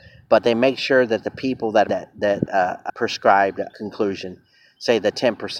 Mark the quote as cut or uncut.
cut